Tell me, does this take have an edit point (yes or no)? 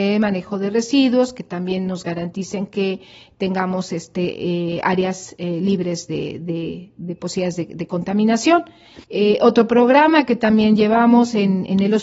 yes